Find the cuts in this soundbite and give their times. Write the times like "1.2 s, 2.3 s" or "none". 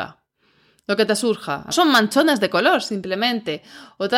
1.7 s

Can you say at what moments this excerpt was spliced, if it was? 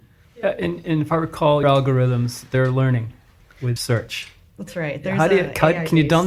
1.6 s, 3.8 s

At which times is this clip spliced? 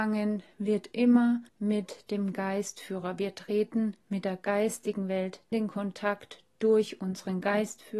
1.5 s, 5.5 s

